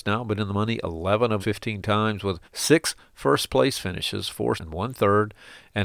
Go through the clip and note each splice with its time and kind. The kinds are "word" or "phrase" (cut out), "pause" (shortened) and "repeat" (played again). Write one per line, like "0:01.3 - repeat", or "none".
0:01.4 - word
0:02.4 - pause
0:04.6 - word